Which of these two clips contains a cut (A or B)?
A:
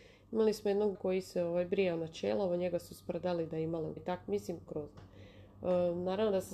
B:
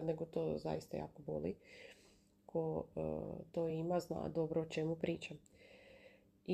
A